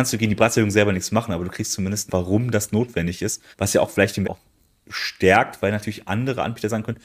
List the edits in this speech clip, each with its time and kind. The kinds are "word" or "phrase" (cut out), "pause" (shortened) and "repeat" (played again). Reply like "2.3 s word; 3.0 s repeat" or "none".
2.1 s phrase; 3.5 s pause; 4.2 s word